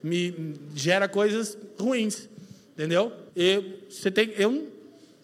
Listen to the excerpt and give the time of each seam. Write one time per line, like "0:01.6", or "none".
0:03.3

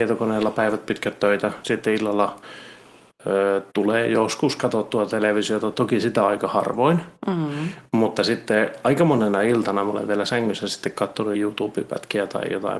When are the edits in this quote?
0:03.7
0:11.3

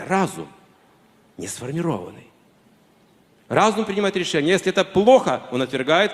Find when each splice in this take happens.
none

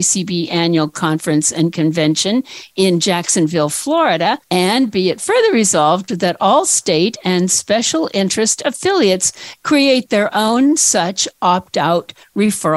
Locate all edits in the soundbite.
0:04.4

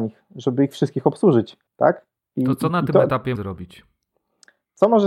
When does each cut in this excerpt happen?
0:01.7
0:03.4

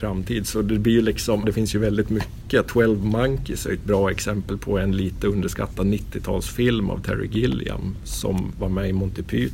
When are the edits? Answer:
0:01.4

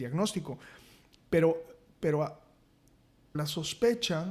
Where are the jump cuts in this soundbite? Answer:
0:03.3

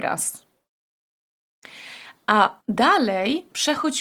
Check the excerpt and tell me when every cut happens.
0:02.6

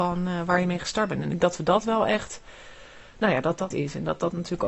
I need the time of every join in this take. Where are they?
0:01.4
0:03.7

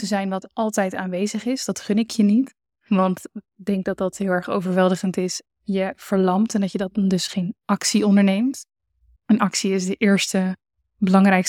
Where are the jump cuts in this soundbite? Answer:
0:05.4

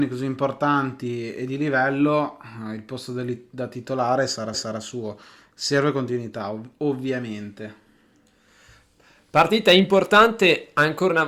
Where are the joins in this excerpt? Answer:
0:04.5

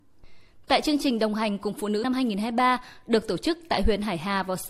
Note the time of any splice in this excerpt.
0:02.0

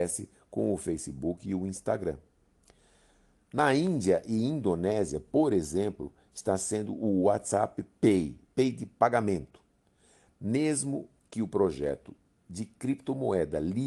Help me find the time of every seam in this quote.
0:06.9

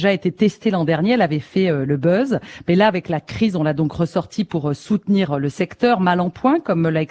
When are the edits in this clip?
0:01.9

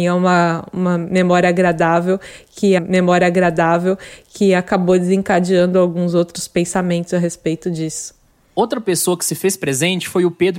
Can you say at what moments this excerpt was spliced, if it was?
0:02.8

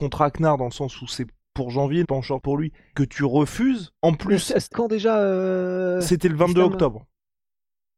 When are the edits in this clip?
0:02.0
0:02.4
0:02.9
0:04.0
0:04.7

